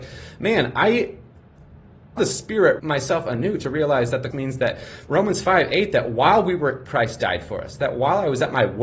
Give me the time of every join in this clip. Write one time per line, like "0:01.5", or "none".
0:02.2
0:02.8
0:04.3
0:06.9